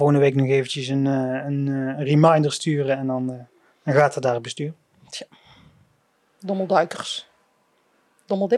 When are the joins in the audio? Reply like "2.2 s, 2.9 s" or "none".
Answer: none